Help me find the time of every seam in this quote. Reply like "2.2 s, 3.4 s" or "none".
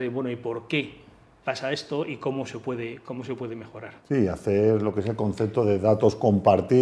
1.4 s, 4.0 s

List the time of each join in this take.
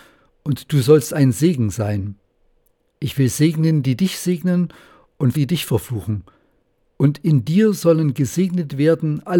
5.3 s

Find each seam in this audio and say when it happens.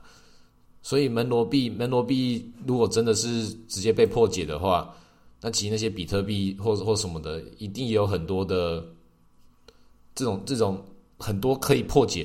none

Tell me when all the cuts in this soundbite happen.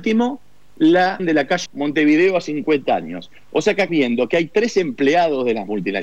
1.2 s, 1.7 s, 3.9 s

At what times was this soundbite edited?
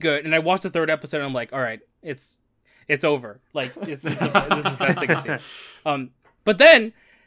none

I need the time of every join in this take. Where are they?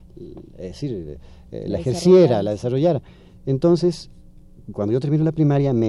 none

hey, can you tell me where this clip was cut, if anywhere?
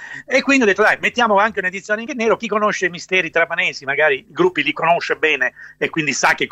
2.1 s, 2.4 s, 4.3 s

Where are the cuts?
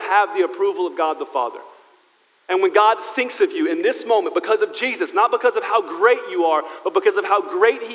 none

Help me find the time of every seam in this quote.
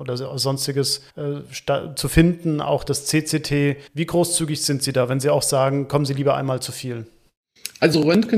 1.1 s, 3.9 s

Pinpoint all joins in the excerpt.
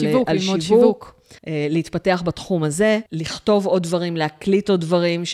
1.4 s, 3.1 s

